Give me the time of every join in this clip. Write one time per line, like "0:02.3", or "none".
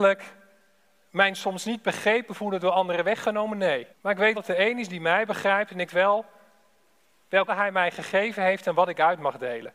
0:03.9
0:04.3
0:05.9
0:07.5